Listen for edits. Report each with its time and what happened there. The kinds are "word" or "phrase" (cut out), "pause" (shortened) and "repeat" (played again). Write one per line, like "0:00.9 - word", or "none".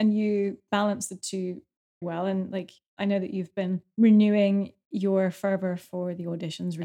0:02.0 - word